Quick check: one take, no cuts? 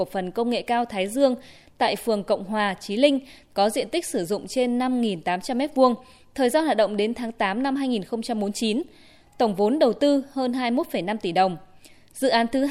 yes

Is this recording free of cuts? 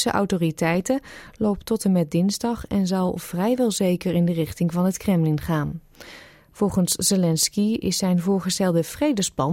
yes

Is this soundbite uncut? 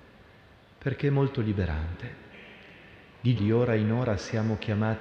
no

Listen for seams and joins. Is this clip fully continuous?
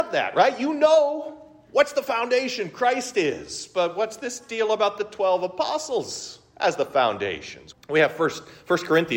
no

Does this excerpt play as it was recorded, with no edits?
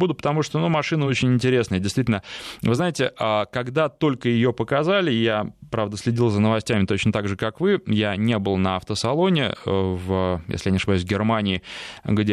yes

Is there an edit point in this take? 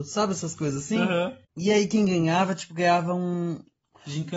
yes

